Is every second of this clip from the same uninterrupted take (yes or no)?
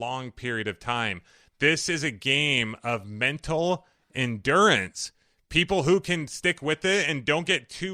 yes